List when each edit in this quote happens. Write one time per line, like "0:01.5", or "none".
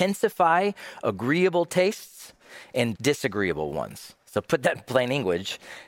0:03.0